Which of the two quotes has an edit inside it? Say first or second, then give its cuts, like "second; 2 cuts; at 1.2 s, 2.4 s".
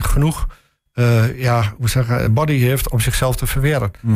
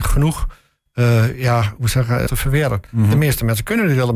second; 1 cut; at 2.3 s